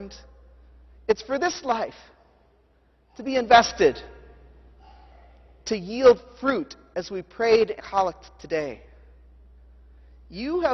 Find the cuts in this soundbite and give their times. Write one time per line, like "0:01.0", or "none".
0:07.8